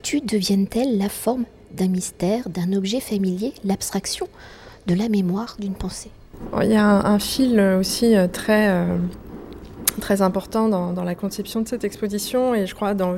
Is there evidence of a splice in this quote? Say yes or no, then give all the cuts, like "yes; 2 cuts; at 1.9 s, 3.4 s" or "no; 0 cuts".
no; 0 cuts